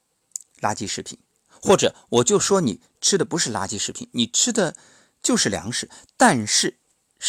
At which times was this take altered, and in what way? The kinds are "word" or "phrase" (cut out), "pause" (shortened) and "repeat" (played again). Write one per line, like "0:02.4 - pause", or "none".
none

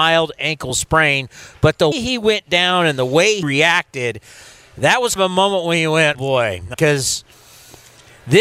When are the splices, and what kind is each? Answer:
0:01.9 - word
0:03.4 - word
0:05.2 - word
0:06.1 - word
0:06.7 - word

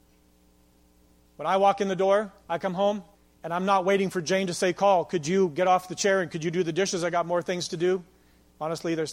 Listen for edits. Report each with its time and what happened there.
0:02.4 - pause
0:03.1 - pause

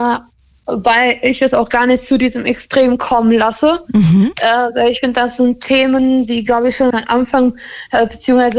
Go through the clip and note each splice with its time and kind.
0:06.9 - word

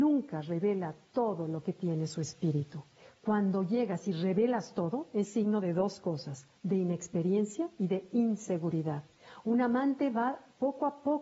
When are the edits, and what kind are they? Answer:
none

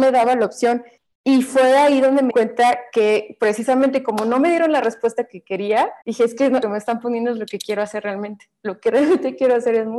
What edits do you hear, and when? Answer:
0:01.0 - pause
0:02.3 - word
0:06.0 - pause
0:06.6 - phrase

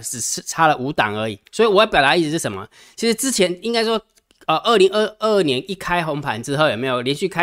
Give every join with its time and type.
0:01.5 - pause

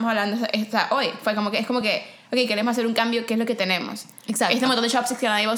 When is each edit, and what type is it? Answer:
none

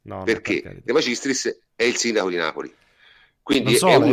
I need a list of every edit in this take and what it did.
0:01.7 - pause

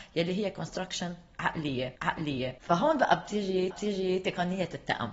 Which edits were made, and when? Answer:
0:02.0 - repeat
0:03.7 - repeat

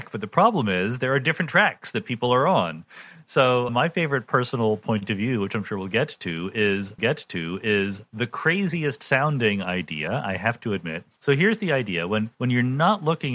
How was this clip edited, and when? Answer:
0:03.7 - word
0:07.0 - repeat
0:11.1 - pause
0:12.3 - pause

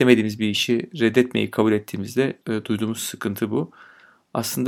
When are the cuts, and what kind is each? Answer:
0:02.4 - pause

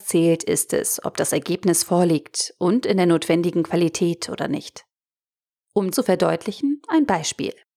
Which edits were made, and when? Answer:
0:05.9 - word

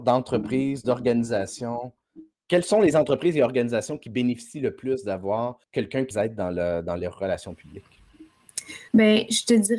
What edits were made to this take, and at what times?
0:02.3 - pause
0:05.6 - pause
0:06.1 - word
0:08.9 - pause

